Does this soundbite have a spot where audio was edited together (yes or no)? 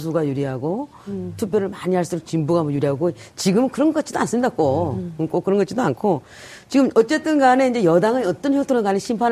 no